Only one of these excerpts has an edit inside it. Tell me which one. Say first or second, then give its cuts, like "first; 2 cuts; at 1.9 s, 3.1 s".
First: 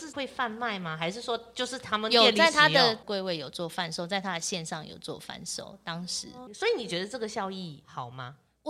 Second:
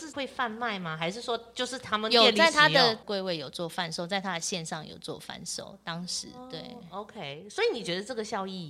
first; 1 cut; at 6.5 s